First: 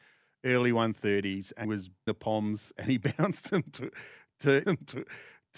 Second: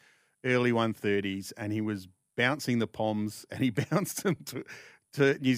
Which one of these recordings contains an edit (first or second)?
first